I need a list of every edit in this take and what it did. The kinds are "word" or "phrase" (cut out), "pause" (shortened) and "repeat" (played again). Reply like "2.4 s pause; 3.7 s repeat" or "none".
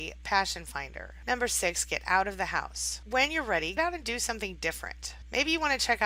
3.8 s word